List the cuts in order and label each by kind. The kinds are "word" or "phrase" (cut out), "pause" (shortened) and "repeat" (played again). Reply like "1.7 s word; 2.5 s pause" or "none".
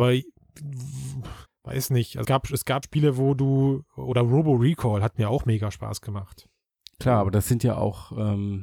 1.5 s pause; 2.2 s word; 2.8 s word; 6.7 s pause